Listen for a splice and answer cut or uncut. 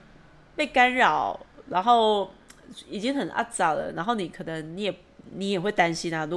uncut